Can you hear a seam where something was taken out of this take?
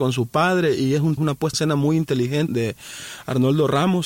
yes; 3 cuts; at 1.2 s, 1.5 s, 2.5 s

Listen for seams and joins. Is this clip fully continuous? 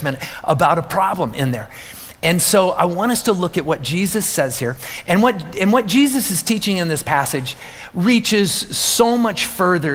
yes; 0 cuts

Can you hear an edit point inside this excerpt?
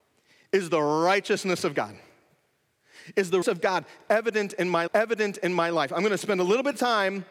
yes; 2 cuts; at 3.4 s, 4.9 s

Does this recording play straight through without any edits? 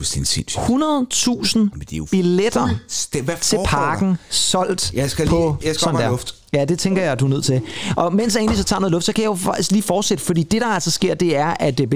yes; 0 cuts

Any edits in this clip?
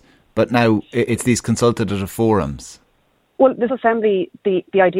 yes; 2 cuts; at 1.1 s, 3.7 s

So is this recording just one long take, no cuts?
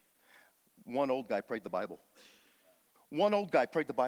yes; 0 cuts

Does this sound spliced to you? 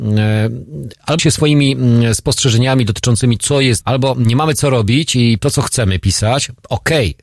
yes; 4 cuts; at 1.2 s, 3.4 s, 3.8 s, 5.4 s

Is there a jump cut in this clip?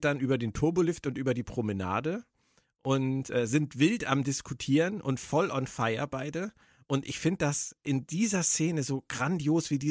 no; 0 cuts

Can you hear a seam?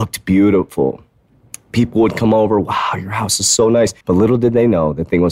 yes; 1 cut; at 4.0 s

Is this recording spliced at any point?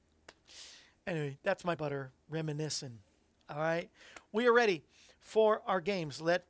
yes; 1 cut; at 1.8 s

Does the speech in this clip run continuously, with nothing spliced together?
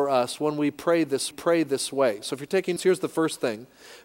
no; 2 cuts; at 1.3 s, 2.8 s

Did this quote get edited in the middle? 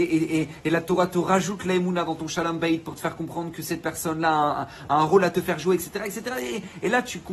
no; 0 cuts

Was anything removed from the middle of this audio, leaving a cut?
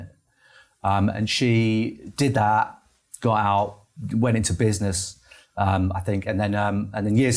no; 0 cuts

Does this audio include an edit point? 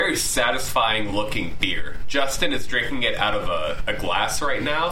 no; 0 cuts

